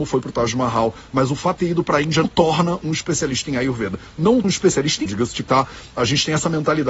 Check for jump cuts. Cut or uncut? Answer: cut